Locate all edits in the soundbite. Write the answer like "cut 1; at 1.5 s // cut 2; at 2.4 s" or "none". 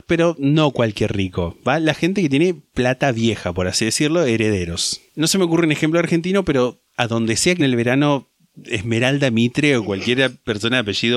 cut 1; at 5.1 s // cut 2; at 6.9 s // cut 3; at 7.6 s